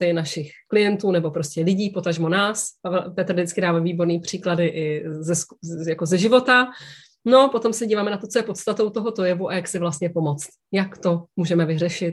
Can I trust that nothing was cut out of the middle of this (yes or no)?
yes